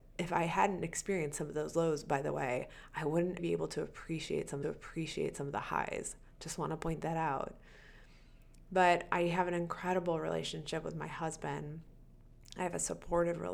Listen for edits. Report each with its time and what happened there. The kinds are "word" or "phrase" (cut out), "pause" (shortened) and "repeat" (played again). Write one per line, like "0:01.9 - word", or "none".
0:03.4 - word
0:04.6 - repeat

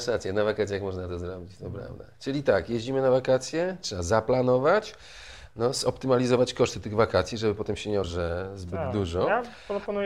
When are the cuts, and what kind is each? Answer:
0:08.0 - word

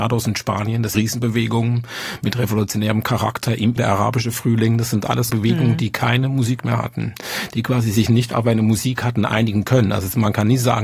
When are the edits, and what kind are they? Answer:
0:00.9 - word
0:03.8 - word
0:05.3 - word

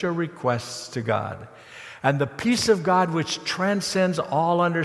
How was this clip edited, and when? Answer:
none

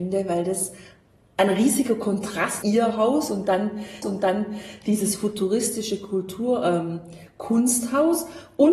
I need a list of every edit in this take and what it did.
0:02.6 - word
0:04.0 - repeat

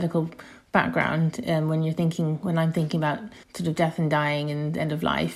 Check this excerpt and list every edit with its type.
0:03.4 - pause

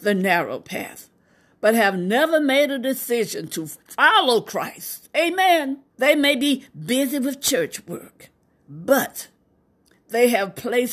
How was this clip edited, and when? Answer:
0:05.9 - pause

